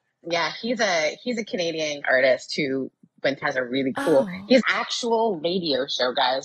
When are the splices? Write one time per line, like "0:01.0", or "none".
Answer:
0:02.0
0:03.4
0:04.6